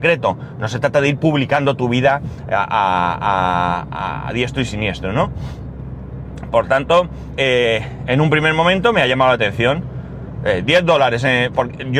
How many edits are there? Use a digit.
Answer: 1